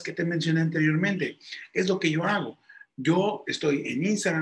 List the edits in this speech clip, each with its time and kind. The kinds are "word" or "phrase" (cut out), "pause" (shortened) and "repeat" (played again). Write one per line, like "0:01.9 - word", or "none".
none